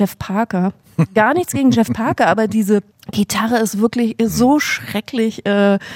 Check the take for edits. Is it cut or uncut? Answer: cut